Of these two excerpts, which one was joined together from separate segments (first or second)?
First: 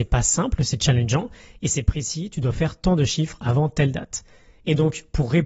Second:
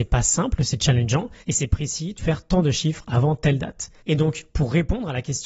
second